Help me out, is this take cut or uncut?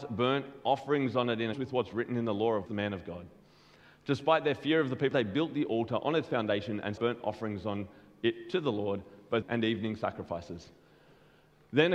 cut